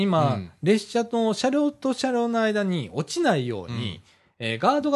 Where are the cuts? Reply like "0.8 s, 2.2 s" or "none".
none